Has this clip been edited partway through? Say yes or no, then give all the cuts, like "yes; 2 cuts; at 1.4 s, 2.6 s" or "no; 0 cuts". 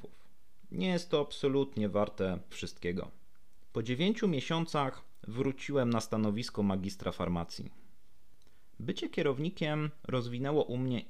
yes; 1 cut; at 2.5 s